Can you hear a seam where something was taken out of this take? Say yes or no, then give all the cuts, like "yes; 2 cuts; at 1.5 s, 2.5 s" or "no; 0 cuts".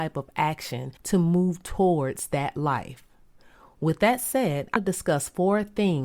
yes; 2 cuts; at 1.0 s, 4.8 s